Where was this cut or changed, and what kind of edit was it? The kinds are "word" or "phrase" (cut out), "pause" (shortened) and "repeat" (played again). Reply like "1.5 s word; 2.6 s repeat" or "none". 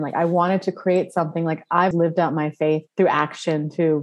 1.9 s word; 2.9 s pause